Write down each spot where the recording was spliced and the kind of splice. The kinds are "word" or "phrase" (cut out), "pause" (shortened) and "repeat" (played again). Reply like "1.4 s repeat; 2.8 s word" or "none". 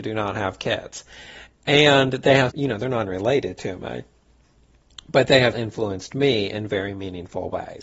2.5 s word; 3.0 s word; 5.5 s word